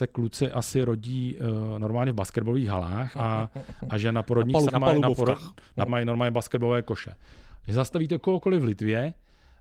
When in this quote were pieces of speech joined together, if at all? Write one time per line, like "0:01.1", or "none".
0:03.1
0:04.7
0:05.9